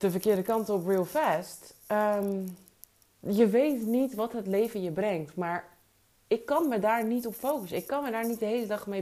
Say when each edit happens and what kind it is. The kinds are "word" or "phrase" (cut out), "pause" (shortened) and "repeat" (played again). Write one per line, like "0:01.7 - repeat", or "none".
none